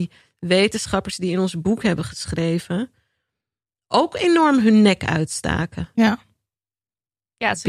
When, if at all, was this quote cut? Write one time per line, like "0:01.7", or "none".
none